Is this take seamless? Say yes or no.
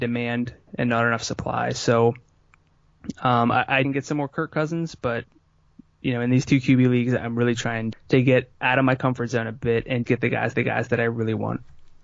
no